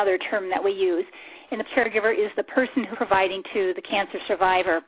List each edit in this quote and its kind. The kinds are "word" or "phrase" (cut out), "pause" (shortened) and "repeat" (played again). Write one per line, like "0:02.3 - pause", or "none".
0:01.6 - phrase
0:02.3 - word
0:02.9 - phrase
0:03.4 - word